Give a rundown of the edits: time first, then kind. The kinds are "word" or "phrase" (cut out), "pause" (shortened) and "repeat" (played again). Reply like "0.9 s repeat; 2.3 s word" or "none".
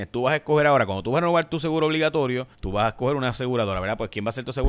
2.5 s pause